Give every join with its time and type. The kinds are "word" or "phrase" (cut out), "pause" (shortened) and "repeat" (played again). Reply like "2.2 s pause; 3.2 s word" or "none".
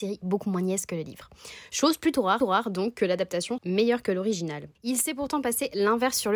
2.4 s repeat; 3.6 s word; 4.7 s pause